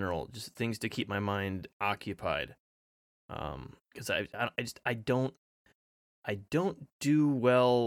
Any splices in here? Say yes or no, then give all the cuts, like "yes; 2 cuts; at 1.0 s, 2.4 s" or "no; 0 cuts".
yes; 3 cuts; at 1.7 s, 3.8 s, 4.5 s